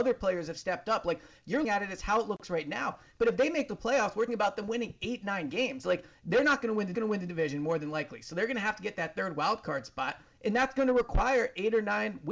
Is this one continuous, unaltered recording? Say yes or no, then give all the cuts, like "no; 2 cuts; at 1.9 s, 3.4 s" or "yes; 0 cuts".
no; 3 cuts; at 1.6 s, 4.3 s, 6.9 s